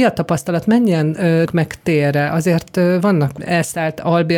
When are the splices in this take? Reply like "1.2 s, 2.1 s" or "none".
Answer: 1.5 s, 3.4 s